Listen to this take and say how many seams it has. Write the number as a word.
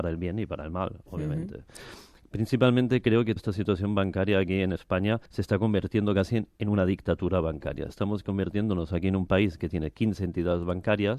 two